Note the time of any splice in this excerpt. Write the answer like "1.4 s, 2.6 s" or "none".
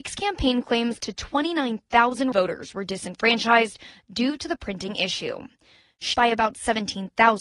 1.0 s, 2.3 s, 6.1 s